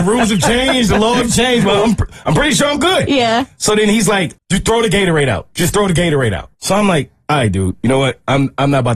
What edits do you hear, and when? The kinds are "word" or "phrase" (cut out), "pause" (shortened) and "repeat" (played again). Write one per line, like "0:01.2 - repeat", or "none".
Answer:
0:04.4 - word
0:06.5 - pause